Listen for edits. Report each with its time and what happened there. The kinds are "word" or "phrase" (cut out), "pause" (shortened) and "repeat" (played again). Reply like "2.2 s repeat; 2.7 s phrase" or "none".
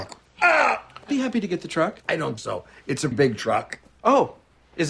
1.1 s word; 2.4 s word; 3.1 s word